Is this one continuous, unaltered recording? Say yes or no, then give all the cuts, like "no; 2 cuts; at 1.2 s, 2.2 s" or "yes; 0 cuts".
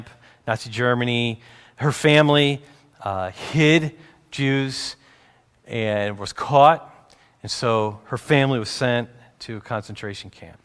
yes; 0 cuts